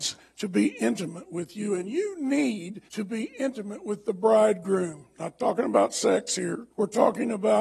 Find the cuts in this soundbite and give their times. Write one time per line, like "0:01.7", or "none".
0:02.9
0:06.7